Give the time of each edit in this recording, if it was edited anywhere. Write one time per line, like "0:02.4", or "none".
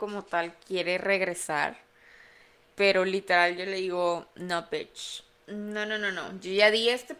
none